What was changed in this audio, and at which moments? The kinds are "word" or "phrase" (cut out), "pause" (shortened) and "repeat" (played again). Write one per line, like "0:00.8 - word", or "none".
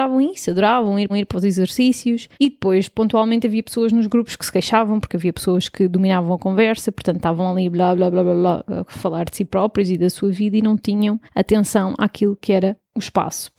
0:01.1 - repeat
0:02.3 - pause
0:11.3 - pause